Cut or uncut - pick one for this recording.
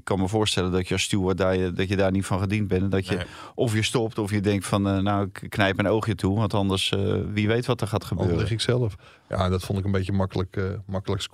uncut